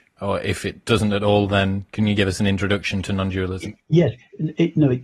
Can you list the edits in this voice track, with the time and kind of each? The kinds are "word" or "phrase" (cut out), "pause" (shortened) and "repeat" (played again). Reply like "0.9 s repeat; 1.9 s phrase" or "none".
none